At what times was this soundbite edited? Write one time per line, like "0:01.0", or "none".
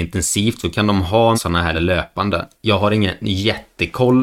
0:01.3
0:01.7

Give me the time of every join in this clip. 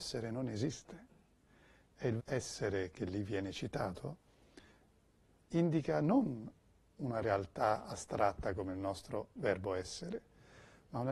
0:02.2

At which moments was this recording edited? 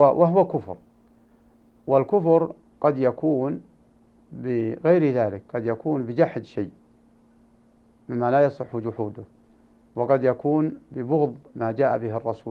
none

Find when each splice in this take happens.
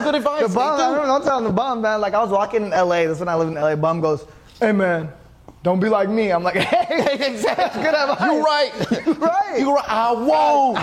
none

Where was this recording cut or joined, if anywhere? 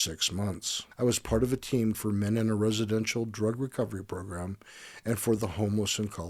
0:00.9
0:01.9

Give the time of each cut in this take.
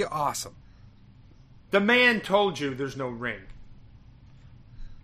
none

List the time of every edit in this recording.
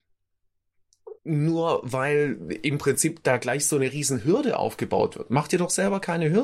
0:01.2

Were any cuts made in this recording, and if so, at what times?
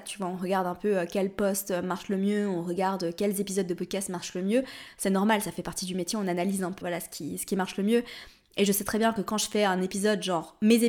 0:06.8

